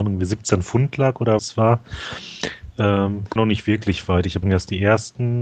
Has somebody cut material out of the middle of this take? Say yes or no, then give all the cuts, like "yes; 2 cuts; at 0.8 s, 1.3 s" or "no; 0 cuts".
yes; 3 cuts; at 1.4 s, 3.4 s, 4.4 s